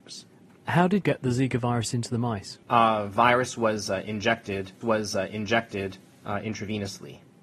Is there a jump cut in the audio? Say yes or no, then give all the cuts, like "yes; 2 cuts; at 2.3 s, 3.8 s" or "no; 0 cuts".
yes; 3 cuts; at 1.0 s, 2.6 s, 4.8 s